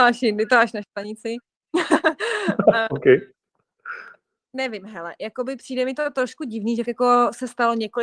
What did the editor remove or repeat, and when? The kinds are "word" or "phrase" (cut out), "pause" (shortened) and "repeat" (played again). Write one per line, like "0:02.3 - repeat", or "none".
0:06.8 - word